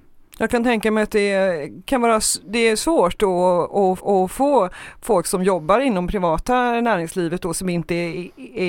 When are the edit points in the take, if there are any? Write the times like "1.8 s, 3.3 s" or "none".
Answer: 4.0 s